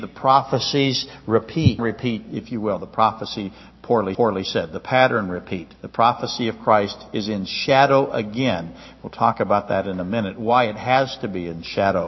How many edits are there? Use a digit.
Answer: 3